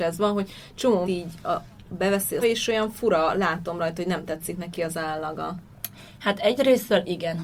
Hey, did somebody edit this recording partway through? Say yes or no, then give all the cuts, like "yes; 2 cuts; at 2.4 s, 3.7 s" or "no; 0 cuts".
yes; 2 cuts; at 1.0 s, 2.4 s